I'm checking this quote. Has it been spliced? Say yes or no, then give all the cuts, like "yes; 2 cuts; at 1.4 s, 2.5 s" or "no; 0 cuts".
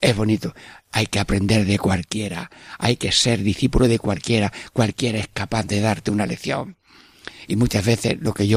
no; 0 cuts